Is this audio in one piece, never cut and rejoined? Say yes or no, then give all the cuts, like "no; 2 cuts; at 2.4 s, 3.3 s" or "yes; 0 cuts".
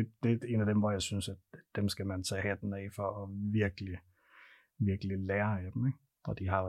yes; 0 cuts